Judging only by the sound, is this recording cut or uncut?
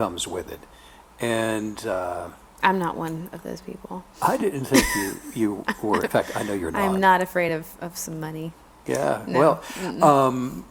uncut